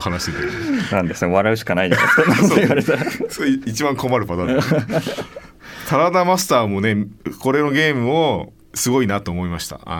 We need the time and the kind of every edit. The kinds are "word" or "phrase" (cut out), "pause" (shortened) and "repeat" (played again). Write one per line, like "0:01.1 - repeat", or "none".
0:08.6 - pause